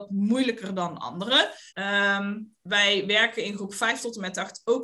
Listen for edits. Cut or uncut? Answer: cut